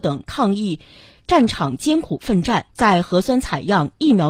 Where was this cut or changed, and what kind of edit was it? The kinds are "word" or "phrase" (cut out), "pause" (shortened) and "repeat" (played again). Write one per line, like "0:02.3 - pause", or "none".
0:02.7 - pause